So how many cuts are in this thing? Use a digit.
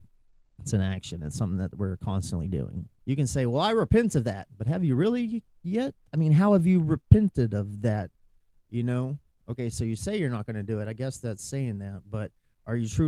1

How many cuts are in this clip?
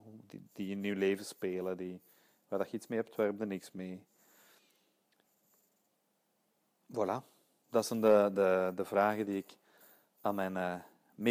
0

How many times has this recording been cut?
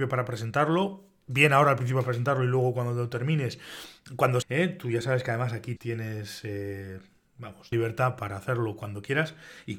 3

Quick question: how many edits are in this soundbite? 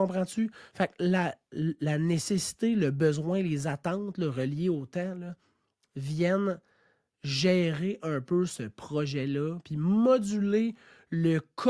0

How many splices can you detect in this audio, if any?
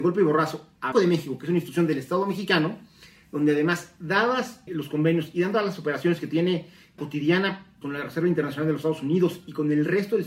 4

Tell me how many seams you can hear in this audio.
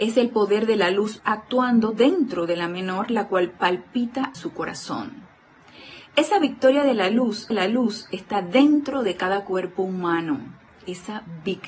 4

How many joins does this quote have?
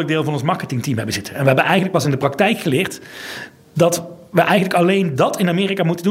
0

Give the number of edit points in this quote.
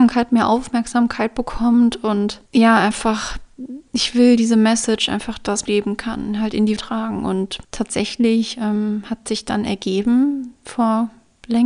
5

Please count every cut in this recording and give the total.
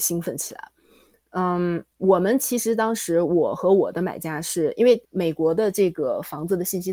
2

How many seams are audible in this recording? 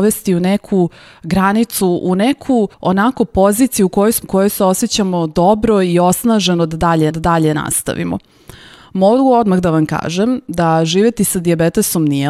3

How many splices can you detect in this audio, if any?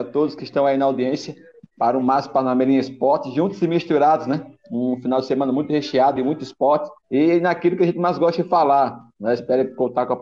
0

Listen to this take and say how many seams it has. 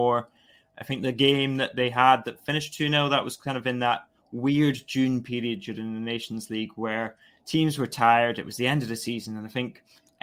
0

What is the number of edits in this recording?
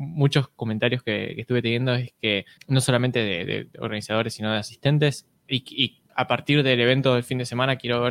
3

